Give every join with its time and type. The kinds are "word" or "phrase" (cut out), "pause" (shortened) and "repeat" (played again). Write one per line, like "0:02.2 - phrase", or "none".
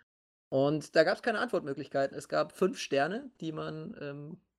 0:02.1 - word